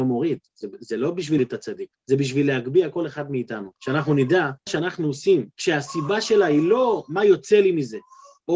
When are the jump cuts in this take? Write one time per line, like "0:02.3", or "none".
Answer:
0:01.4
0:01.9
0:03.8
0:04.7
0:05.5